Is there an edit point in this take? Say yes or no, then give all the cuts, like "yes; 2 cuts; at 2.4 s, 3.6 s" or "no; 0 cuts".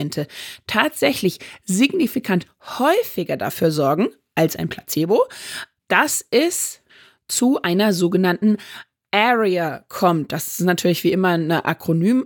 no; 0 cuts